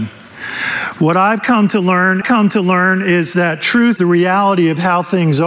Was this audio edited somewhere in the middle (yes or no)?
yes